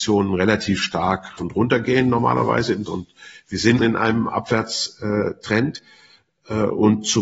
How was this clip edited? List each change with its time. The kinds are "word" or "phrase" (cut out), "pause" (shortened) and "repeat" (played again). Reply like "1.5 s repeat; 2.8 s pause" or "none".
1.4 s word; 2.9 s word; 3.8 s word